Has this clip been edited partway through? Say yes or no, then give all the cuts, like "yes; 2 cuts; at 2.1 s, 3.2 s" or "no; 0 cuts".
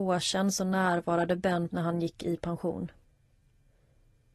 yes; 1 cut; at 1.7 s